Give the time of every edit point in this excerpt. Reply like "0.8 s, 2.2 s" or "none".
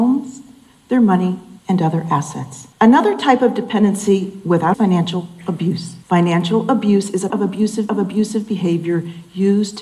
1.6 s, 2.7 s, 4.7 s, 6.0 s, 7.3 s, 7.9 s